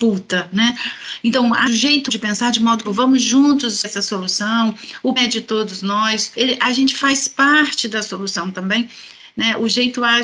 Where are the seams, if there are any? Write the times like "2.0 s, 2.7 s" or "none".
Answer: 1.7 s, 2.1 s, 2.8 s, 3.8 s, 5.2 s